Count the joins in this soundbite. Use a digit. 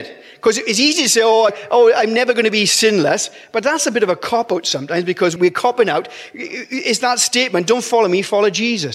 2